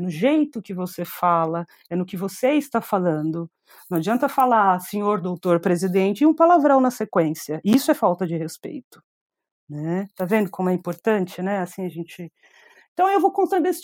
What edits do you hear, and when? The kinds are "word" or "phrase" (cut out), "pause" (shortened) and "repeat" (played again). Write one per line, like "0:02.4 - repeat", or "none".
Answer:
none